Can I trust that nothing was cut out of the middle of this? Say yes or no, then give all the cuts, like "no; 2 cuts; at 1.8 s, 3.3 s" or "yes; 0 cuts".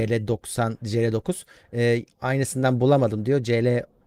yes; 0 cuts